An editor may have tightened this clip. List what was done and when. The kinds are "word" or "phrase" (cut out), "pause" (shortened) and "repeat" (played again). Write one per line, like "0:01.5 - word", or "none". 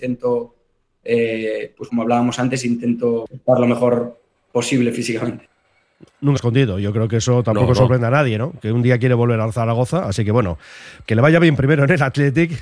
0:01.9 - word
0:06.4 - word
0:11.1 - word